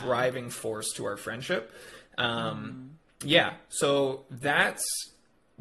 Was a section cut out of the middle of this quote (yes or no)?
no